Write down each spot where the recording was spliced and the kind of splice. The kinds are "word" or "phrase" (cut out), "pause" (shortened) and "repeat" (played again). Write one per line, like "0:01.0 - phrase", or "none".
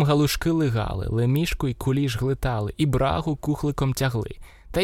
none